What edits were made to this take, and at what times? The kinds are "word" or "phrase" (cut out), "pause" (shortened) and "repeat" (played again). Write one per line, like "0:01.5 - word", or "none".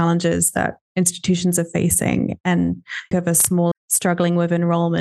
0:03.1 - phrase
0:03.7 - phrase